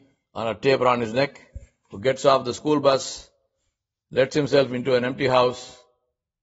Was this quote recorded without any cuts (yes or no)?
yes